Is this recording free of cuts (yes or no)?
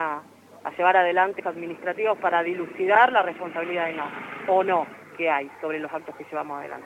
no